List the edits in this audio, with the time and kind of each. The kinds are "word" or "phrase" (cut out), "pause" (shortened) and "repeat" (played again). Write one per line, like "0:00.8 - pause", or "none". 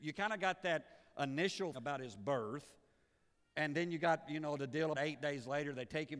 0:01.7 - word
0:04.9 - word